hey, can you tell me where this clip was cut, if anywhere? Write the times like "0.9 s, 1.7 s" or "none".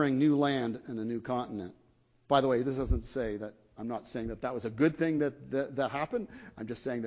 none